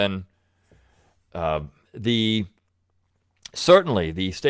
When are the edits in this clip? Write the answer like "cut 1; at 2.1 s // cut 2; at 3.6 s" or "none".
none